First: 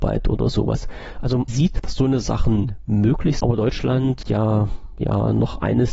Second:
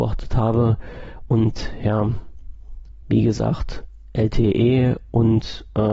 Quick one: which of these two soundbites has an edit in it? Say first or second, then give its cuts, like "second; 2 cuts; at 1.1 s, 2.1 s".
first; 4 cuts; at 1.5 s, 1.8 s, 3.4 s, 4.2 s